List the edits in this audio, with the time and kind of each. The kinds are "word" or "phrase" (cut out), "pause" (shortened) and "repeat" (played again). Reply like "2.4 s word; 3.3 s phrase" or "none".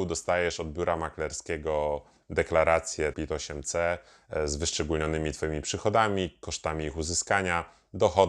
3.1 s word